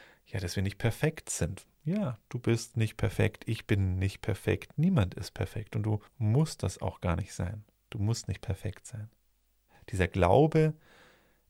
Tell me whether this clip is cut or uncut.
cut